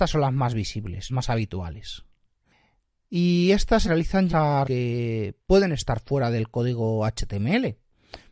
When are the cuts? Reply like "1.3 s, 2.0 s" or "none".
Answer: 1.1 s, 3.8 s, 4.3 s, 4.6 s

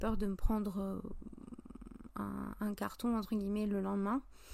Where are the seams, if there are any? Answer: none

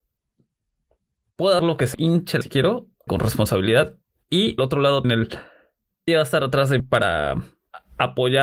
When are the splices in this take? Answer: 1.6 s, 1.9 s, 2.4 s, 3.1 s, 4.6 s, 5.0 s, 6.1 s, 6.8 s

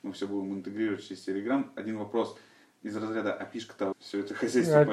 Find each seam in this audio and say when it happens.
3.9 s

